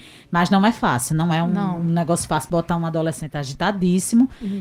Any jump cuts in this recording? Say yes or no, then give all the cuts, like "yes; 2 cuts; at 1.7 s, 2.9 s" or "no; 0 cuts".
no; 0 cuts